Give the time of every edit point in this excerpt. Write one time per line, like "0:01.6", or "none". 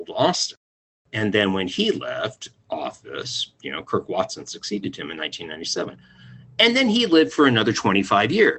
none